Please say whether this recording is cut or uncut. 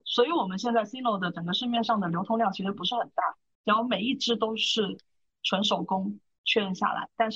uncut